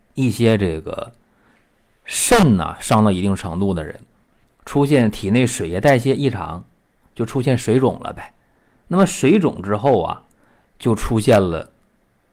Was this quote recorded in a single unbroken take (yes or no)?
yes